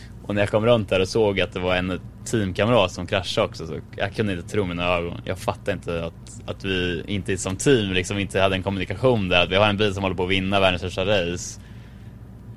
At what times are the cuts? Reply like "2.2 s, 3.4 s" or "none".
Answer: none